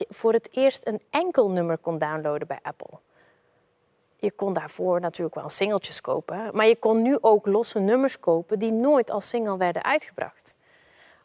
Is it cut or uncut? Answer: uncut